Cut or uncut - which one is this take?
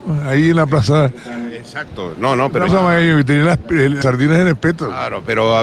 cut